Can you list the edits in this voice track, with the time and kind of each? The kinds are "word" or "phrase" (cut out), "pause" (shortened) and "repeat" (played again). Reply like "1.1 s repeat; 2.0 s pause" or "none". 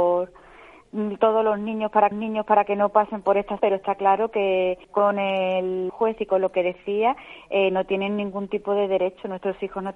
2.1 s repeat; 3.6 s word; 4.8 s pause; 5.9 s phrase